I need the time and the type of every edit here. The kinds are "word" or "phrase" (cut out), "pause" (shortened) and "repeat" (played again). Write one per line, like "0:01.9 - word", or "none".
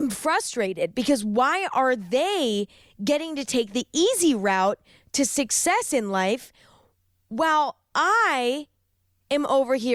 none